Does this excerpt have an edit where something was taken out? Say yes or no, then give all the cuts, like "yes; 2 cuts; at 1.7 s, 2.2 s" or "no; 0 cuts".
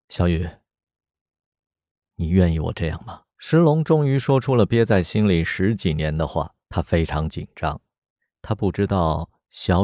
yes; 2 cuts; at 3.3 s, 6.6 s